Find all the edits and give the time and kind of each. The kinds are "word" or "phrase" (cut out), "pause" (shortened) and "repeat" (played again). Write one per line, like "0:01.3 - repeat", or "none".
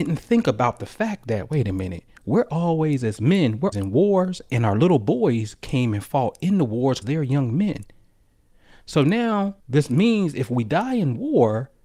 0:02.1 - pause
0:03.7 - word
0:07.0 - word
0:09.6 - pause